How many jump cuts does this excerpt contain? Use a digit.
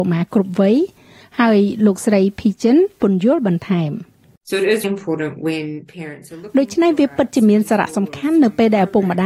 1